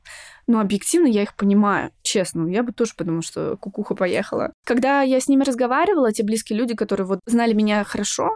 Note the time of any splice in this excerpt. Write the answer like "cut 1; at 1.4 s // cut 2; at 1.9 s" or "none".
cut 1; at 4.6 s